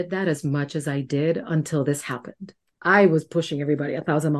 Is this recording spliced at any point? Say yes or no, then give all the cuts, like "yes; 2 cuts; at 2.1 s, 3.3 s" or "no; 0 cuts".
no; 0 cuts